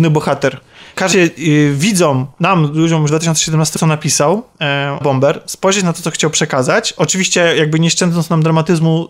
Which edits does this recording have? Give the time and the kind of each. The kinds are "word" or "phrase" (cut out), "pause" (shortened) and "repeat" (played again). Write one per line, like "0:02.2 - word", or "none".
0:01.1 - phrase
0:02.3 - pause
0:03.1 - phrase
0:03.8 - phrase
0:04.5 - pause
0:05.0 - word